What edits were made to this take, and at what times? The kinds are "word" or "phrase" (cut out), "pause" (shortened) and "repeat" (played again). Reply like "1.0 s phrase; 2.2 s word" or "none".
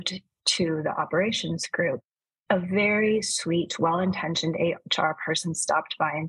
none